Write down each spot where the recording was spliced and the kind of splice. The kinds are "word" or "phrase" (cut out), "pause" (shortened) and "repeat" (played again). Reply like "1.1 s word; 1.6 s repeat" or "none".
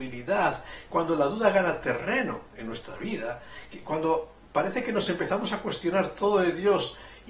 none